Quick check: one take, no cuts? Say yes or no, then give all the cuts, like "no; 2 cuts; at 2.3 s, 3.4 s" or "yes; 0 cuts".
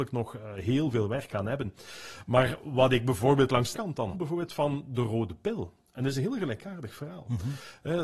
no; 2 cuts; at 3.7 s, 4.1 s